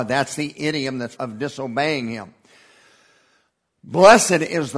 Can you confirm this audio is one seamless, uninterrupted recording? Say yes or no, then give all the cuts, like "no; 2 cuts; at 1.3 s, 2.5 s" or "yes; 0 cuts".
no; 1 cut; at 1.1 s